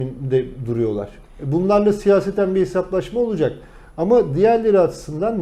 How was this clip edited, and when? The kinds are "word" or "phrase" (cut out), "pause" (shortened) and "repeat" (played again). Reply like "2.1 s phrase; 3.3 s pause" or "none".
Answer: none